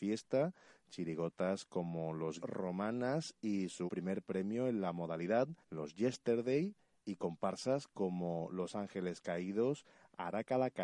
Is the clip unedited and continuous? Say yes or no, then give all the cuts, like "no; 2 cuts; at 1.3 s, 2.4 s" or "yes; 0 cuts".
no; 3 cuts; at 2.4 s, 3.9 s, 5.6 s